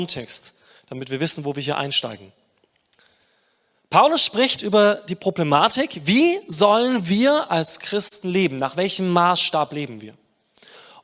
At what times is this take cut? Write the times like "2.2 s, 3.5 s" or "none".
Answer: none